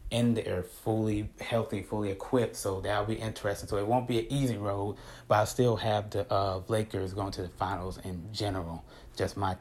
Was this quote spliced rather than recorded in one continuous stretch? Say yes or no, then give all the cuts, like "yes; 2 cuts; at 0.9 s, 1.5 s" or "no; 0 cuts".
no; 0 cuts